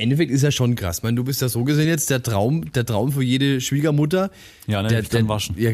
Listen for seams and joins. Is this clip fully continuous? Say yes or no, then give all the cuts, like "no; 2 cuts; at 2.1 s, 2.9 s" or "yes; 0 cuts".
yes; 0 cuts